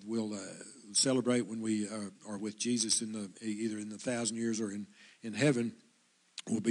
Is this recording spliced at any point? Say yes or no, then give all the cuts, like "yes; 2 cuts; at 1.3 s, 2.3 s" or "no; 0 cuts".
no; 0 cuts